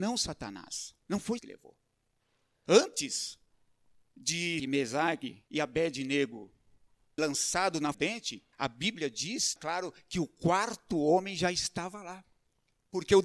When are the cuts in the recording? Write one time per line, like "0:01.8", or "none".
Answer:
0:01.0
0:01.4
0:04.6
0:05.5
0:07.2
0:07.9
0:08.5
0:09.6